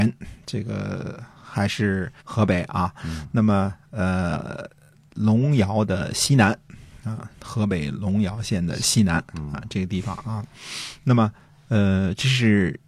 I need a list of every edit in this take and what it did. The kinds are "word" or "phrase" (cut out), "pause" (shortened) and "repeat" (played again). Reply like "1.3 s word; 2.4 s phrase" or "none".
2.2 s pause; 7.3 s pause